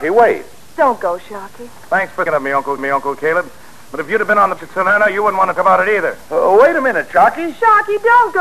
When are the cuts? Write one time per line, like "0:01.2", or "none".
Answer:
0:02.3
0:02.8
0:04.6
0:05.6